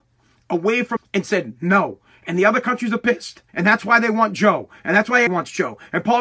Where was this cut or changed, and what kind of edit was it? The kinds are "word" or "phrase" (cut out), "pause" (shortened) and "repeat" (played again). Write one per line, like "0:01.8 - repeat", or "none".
0:01.0 - phrase
0:03.5 - pause
0:05.3 - word